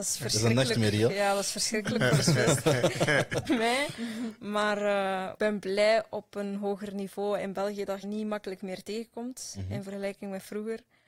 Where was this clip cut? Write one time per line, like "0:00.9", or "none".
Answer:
0:03.5
0:05.4
0:08.0